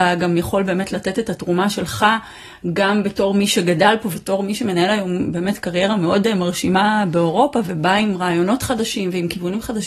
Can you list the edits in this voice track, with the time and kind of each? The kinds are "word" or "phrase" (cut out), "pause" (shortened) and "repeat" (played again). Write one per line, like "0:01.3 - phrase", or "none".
0:04.1 - word